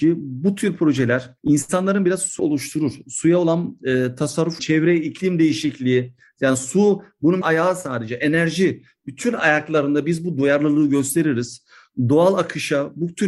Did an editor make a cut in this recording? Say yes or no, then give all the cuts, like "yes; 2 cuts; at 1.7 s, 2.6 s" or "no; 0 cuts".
yes; 4 cuts; at 1.4 s, 2.4 s, 4.6 s, 7.4 s